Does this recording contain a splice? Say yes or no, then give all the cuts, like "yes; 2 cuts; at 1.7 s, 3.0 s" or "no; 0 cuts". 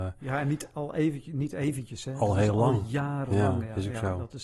no; 0 cuts